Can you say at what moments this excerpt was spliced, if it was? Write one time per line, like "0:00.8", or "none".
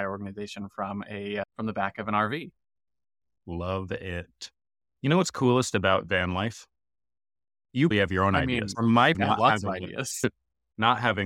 0:07.9
0:08.7
0:09.1